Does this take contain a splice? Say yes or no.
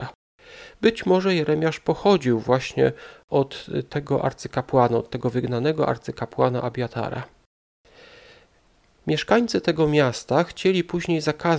no